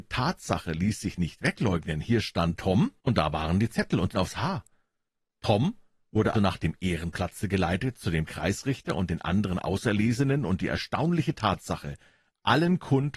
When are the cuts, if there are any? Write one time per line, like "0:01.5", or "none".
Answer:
0:03.0
0:04.1
0:06.3